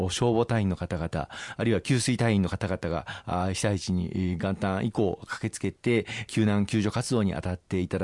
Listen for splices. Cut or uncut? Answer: uncut